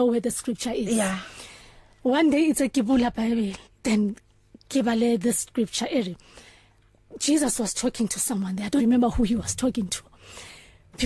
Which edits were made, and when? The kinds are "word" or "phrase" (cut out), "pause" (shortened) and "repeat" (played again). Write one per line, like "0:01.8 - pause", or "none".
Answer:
0:03.6 - pause
0:08.8 - word

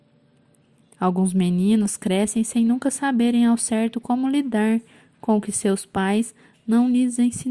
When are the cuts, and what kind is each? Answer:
none

